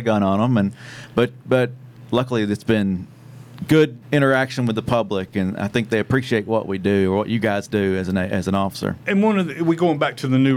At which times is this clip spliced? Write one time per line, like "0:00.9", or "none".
0:04.0